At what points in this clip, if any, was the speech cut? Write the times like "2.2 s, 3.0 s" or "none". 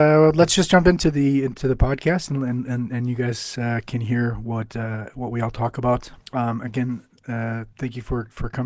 6.2 s

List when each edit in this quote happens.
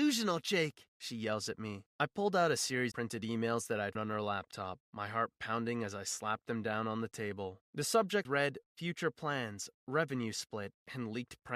2.9 s, 3.9 s, 8.2 s

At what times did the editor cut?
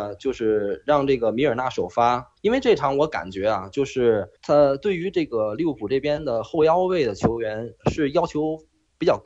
2.4 s, 4.4 s

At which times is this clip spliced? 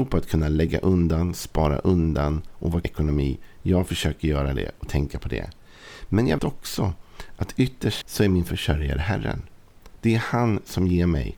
2.8 s, 6.4 s, 8.0 s

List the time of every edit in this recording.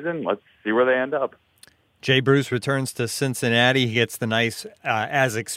none

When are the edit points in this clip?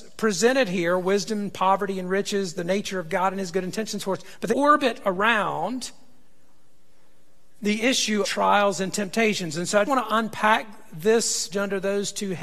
4.5 s, 8.2 s, 9.8 s, 11.5 s

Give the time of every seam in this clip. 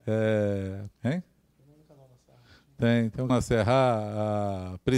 0.9 s, 3.3 s

